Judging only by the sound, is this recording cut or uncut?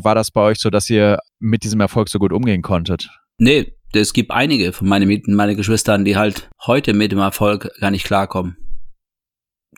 uncut